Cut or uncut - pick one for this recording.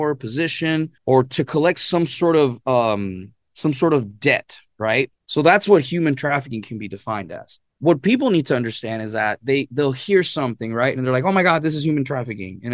cut